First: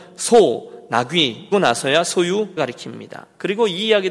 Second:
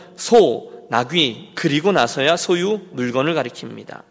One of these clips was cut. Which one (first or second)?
first